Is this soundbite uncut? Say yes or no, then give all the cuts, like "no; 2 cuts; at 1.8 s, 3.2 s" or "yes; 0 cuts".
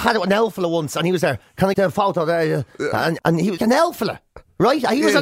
no; 3 cuts; at 1.7 s, 3.2 s, 3.6 s